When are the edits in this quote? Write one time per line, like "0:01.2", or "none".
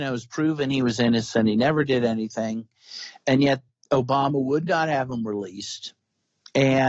none